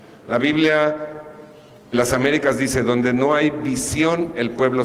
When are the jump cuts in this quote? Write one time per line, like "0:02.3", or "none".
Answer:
0:01.9